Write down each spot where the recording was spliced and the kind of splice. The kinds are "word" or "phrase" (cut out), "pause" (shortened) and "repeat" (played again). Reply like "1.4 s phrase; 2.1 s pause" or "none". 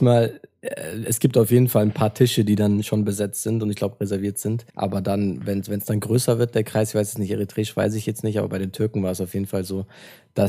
4.7 s pause